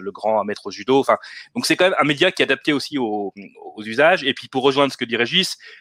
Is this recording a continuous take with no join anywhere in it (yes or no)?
yes